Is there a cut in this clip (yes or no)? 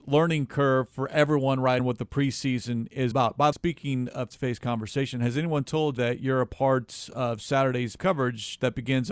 yes